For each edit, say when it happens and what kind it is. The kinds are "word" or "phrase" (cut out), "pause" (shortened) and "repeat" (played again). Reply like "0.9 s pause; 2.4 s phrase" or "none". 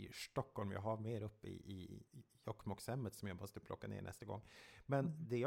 2.1 s pause